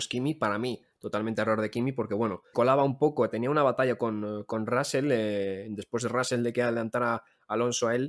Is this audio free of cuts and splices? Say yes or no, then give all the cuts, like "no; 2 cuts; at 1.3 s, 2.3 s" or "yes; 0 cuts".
no; 1 cut; at 2.5 s